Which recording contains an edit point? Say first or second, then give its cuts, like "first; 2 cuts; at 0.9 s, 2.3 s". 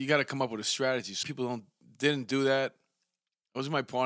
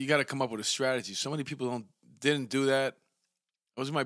first; 1 cut; at 1.2 s